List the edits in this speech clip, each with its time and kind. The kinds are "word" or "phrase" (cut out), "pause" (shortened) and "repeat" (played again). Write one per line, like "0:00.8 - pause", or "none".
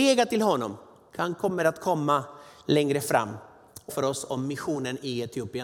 0:03.9 - word